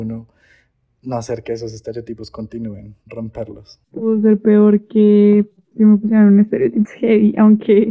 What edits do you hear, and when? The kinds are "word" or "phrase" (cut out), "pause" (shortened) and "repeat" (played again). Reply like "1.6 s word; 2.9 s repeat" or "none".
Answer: 3.8 s pause; 5.7 s word; 6.8 s word

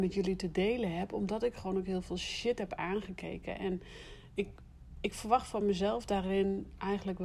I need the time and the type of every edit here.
none

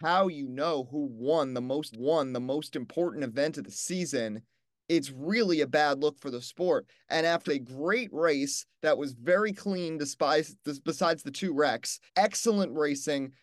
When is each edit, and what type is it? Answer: 1.9 s repeat; 7.5 s phrase; 10.8 s pause; 12.1 s pause

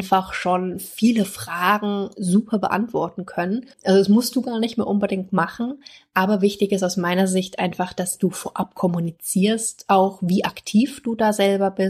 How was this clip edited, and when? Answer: 3.7 s pause

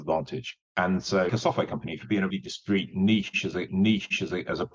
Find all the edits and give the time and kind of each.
1.3 s word; 2.3 s word; 3.7 s repeat

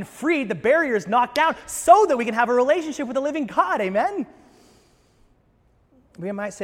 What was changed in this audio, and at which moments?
none

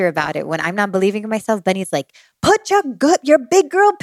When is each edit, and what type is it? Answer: none

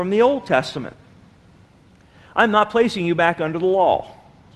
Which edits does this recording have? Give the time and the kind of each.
none

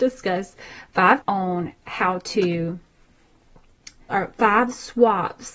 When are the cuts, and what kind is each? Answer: 1.2 s word; 4.1 s word

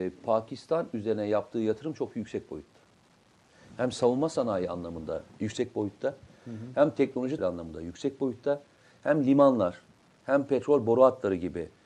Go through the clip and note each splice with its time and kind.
7.4 s word

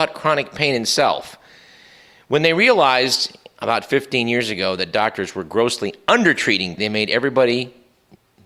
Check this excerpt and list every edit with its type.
6.8 s phrase

